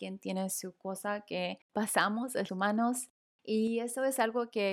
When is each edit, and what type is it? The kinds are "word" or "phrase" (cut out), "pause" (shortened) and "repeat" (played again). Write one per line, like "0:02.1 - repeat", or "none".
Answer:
0:01.7 - phrase
0:02.5 - phrase